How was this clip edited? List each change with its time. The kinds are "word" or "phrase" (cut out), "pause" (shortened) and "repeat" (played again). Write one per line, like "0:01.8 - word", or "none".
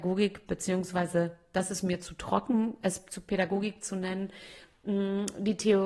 none